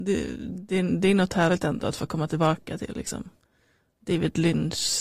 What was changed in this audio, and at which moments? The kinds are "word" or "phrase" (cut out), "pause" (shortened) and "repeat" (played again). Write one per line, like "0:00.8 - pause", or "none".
none